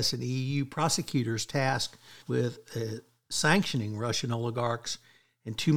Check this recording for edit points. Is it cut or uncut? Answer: cut